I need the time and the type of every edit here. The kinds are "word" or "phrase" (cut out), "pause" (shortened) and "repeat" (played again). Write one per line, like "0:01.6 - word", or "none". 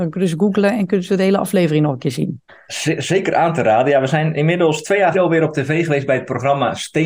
0:02.5 - pause
0:05.1 - word